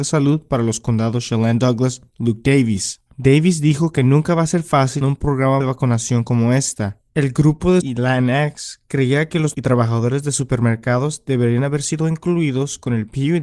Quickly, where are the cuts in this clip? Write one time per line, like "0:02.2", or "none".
0:03.1
0:05.0
0:05.6
0:07.1
0:07.8
0:09.5